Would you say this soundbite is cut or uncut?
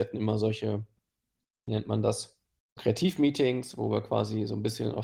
cut